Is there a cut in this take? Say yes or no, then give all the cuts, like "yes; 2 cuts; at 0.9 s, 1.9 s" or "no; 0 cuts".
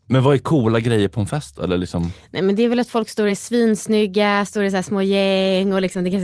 no; 0 cuts